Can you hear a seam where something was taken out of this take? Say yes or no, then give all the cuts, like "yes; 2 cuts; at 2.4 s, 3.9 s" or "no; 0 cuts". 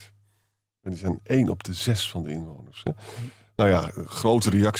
no; 0 cuts